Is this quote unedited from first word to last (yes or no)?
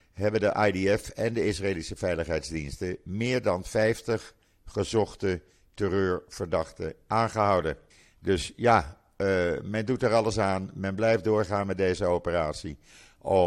no